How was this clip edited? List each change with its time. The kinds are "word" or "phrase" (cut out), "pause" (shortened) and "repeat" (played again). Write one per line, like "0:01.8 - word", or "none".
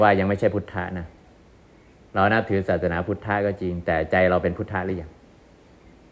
none

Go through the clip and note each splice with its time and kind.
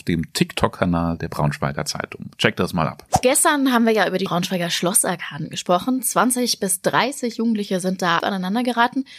0:04.3 - phrase
0:08.2 - word

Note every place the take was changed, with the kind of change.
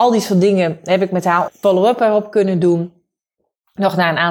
0:01.5 - word

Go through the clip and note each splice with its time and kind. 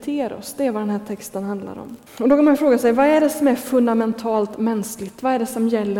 0:02.1 - pause

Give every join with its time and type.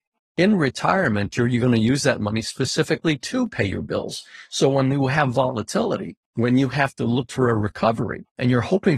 0:06.3 - pause

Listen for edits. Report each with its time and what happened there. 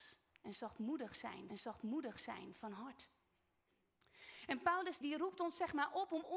0:01.5 - repeat
0:05.0 - word

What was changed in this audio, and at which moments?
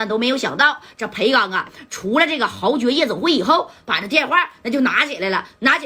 none

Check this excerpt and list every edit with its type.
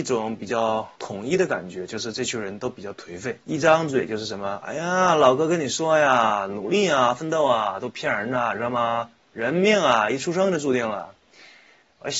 0:01.0 - pause
0:03.4 - pause

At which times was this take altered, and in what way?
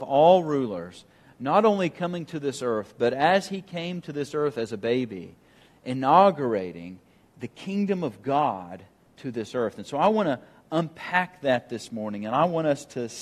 none

